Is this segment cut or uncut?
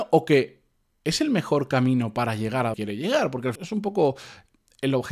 cut